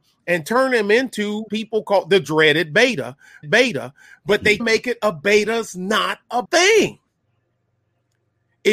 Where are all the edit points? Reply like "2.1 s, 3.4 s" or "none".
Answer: 1.5 s, 3.4 s, 4.6 s, 6.4 s